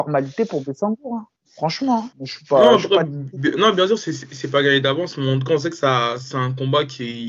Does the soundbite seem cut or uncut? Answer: cut